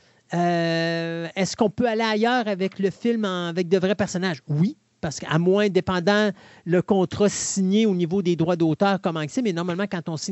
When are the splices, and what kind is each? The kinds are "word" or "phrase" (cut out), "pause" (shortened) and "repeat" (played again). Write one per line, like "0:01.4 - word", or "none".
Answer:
none